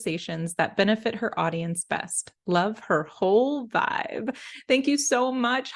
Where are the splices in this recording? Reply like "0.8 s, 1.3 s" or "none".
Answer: none

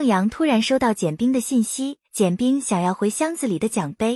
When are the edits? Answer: 2.0 s

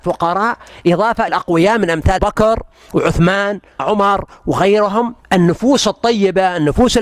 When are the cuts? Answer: 1.3 s, 2.2 s, 3.8 s, 5.2 s

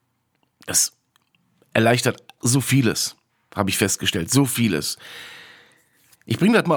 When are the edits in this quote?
2.4 s

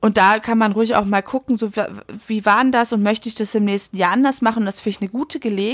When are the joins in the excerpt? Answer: none

